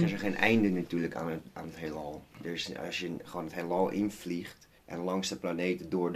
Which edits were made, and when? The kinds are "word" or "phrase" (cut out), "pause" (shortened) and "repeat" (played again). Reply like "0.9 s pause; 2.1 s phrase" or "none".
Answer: 2.3 s pause; 4.8 s pause